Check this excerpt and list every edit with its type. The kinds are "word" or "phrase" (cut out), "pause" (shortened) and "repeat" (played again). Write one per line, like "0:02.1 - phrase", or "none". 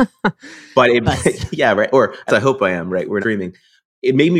0:01.1 - phrase
0:02.3 - word
0:03.2 - word